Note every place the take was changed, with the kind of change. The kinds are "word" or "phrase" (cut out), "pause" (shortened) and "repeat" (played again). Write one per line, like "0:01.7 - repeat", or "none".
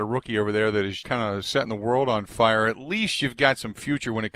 0:01.0 - word